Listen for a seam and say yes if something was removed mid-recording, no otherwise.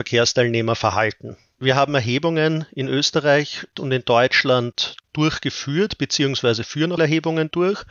yes